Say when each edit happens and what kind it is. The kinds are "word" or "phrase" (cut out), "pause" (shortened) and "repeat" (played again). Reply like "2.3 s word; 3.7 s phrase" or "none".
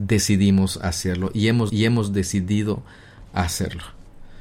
1.7 s repeat